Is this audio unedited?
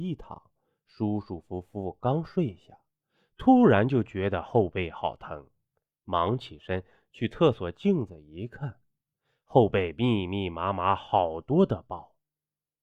yes; 0 cuts

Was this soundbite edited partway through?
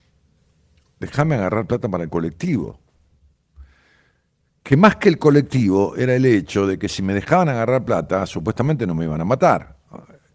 no; 0 cuts

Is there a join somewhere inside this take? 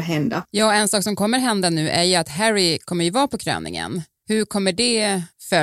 no; 0 cuts

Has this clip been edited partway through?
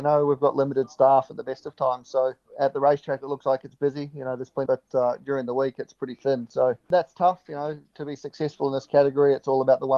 yes; 1 cut; at 4.7 s

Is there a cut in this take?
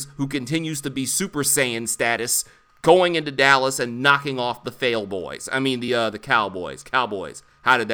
no; 0 cuts

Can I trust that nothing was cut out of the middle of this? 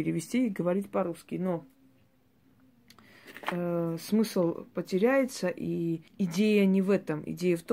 no; 1 cut; at 6.1 s

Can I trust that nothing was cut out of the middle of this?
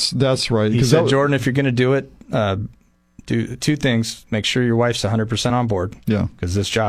yes; 0 cuts

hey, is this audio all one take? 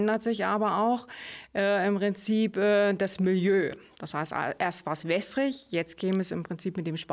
yes; 0 cuts

